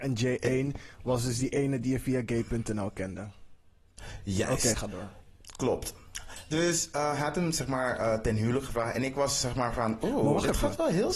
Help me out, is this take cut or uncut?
uncut